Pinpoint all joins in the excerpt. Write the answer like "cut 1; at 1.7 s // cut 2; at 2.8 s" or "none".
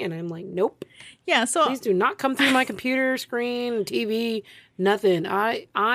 none